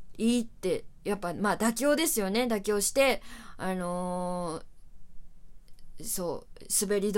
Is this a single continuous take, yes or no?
yes